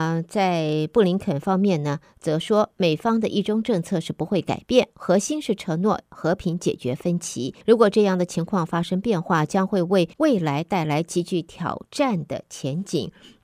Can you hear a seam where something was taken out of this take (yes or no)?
yes